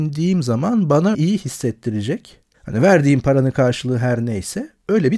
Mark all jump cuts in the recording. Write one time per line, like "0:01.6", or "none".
0:01.1
0:02.5